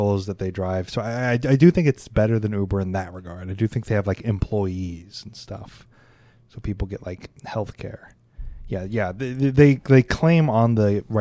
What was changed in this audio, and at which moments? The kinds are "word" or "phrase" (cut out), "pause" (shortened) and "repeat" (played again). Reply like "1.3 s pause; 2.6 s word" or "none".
none